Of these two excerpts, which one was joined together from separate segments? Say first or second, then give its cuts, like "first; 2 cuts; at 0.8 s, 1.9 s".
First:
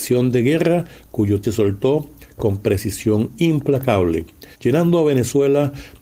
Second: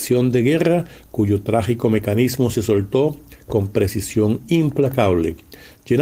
first; 2 cuts; at 1.4 s, 4.5 s